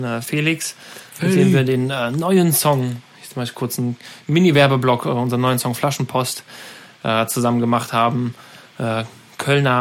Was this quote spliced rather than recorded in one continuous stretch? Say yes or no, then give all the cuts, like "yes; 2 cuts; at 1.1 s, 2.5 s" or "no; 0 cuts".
no; 0 cuts